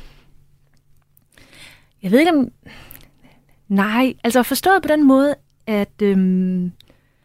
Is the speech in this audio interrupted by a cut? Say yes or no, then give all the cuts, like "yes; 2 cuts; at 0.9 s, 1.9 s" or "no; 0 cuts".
no; 0 cuts